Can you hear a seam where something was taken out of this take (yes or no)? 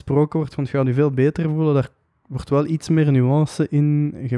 no